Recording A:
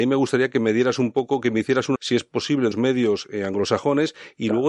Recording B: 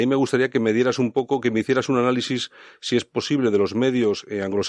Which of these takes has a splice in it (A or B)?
A